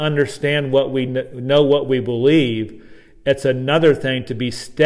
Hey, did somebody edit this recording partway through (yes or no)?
no